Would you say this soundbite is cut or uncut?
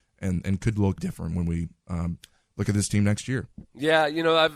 cut